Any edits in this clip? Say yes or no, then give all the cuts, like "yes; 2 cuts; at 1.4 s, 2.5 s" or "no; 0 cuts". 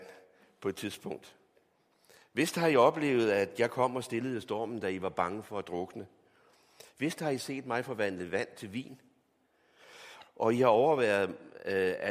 no; 0 cuts